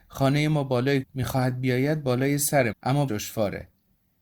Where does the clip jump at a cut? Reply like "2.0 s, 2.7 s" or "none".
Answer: 1.0 s, 2.7 s, 3.1 s